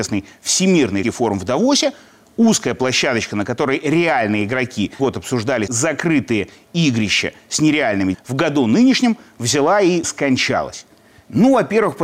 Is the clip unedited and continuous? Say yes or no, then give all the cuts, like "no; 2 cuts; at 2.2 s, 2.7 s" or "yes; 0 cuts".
no; 5 cuts; at 1.0 s, 5.0 s, 5.7 s, 8.1 s, 10.0 s